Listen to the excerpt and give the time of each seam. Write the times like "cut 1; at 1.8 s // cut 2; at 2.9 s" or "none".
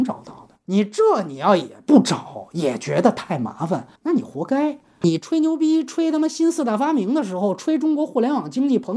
cut 1; at 4.0 s